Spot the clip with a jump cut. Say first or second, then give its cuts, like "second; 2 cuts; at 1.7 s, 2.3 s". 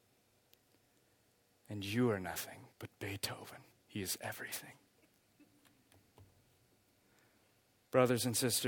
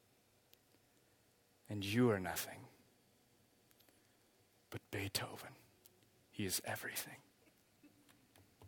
first; 2 cuts; at 2.7 s, 3.7 s